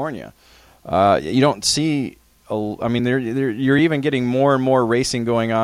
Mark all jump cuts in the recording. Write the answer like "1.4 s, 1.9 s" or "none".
none